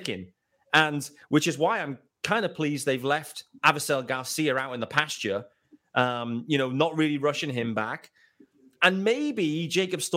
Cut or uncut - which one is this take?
uncut